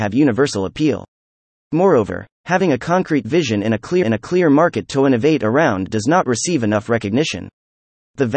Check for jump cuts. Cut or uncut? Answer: cut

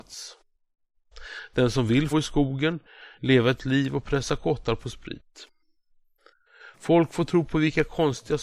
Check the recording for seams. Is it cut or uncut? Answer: cut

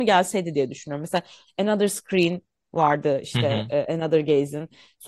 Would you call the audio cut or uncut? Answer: uncut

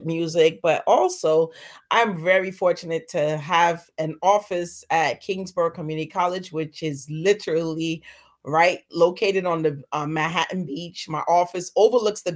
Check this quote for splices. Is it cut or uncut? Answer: uncut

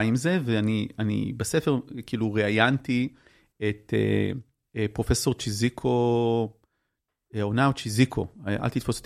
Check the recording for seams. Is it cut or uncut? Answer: uncut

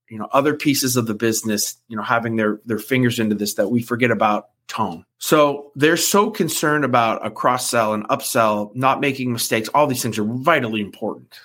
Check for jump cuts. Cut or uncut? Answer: cut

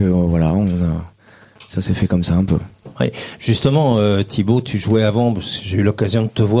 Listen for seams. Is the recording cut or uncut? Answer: uncut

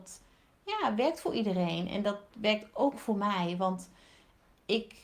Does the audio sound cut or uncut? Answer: uncut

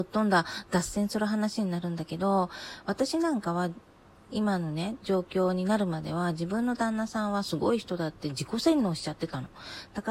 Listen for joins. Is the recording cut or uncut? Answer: uncut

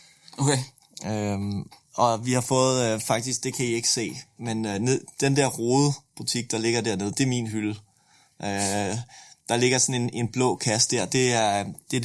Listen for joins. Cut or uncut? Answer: uncut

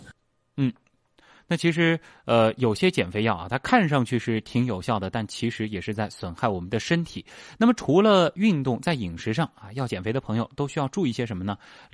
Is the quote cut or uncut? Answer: uncut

